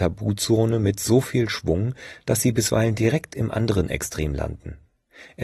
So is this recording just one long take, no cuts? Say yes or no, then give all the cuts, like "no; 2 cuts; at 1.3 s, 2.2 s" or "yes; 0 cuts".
yes; 0 cuts